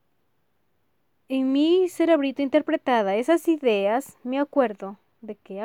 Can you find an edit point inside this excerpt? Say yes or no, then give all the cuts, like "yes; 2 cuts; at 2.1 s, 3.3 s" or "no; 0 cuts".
no; 0 cuts